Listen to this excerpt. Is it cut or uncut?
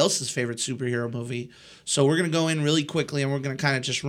uncut